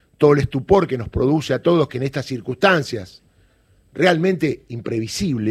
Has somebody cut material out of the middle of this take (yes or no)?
no